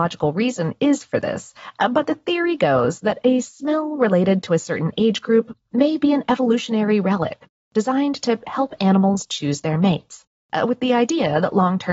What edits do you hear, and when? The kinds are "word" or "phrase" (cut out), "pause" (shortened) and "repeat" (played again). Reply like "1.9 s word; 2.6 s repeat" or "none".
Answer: none